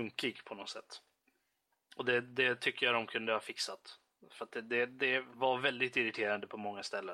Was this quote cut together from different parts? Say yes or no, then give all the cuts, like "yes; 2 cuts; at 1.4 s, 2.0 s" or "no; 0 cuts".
no; 0 cuts